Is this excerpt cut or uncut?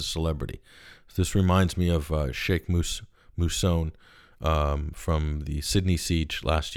uncut